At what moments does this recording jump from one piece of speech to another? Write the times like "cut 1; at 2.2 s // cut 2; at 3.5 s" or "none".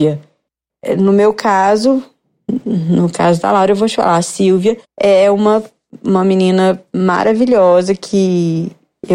cut 1; at 4.8 s